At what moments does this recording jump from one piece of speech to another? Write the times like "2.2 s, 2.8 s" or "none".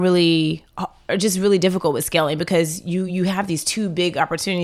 none